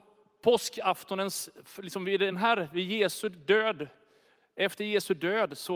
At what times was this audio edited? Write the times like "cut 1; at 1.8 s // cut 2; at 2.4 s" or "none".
none